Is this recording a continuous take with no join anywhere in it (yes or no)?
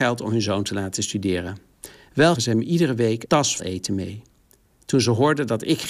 no